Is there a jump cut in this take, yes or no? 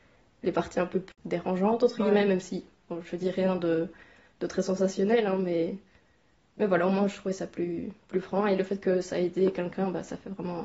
no